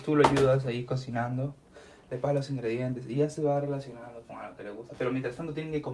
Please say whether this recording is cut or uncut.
uncut